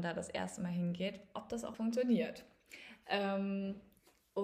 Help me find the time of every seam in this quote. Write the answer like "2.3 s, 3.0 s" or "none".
1.7 s